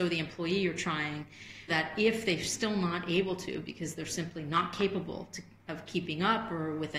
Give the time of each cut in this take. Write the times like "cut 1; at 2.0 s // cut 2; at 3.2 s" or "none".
cut 1; at 1.7 s